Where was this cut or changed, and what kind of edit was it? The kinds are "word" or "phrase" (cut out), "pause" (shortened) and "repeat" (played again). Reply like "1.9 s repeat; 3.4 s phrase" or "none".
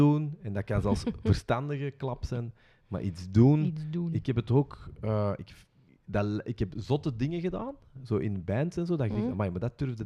5.9 s pause